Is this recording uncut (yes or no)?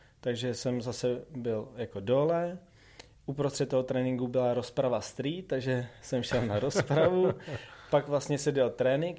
yes